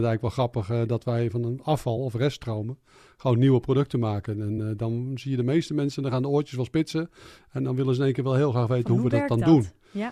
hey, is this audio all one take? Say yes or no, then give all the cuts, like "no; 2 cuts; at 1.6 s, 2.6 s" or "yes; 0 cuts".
yes; 0 cuts